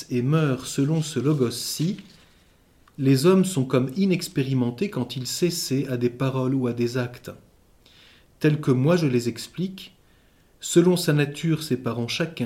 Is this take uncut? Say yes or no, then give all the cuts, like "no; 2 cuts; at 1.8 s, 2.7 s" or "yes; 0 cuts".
yes; 0 cuts